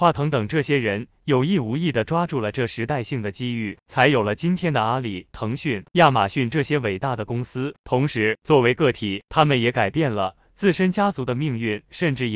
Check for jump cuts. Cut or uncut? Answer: uncut